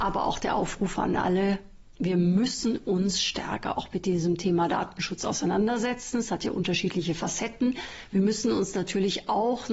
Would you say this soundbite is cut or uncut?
uncut